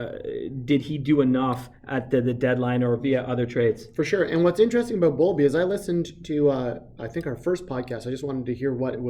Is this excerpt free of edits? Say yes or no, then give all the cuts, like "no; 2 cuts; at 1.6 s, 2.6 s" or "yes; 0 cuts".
yes; 0 cuts